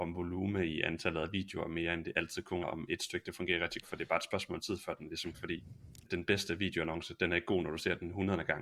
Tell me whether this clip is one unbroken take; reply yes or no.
no